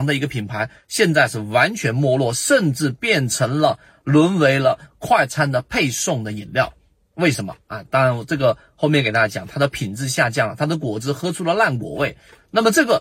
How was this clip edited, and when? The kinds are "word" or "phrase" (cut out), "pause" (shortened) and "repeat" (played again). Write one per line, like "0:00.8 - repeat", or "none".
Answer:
none